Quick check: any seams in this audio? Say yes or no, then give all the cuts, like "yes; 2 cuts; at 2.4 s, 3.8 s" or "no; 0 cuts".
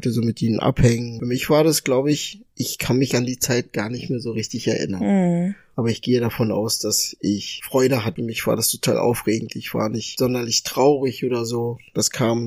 no; 0 cuts